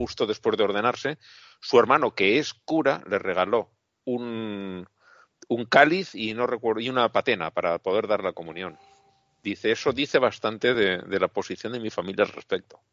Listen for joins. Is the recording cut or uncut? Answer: uncut